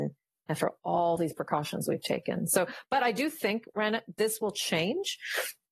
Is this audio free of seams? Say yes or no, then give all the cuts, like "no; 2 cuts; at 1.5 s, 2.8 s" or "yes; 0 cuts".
yes; 0 cuts